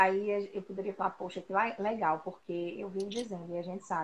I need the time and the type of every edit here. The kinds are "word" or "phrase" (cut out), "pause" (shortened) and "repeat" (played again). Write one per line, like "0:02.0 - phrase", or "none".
none